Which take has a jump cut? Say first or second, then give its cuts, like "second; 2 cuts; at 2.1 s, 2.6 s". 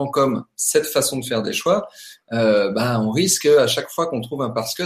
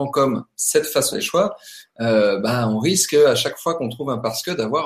second; 1 cut; at 1.1 s